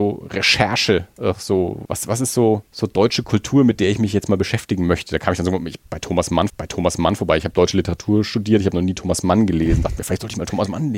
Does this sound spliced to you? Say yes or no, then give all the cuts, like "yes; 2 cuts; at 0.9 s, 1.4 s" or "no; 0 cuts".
yes; 3 cuts; at 1.8 s, 2.7 s, 6.5 s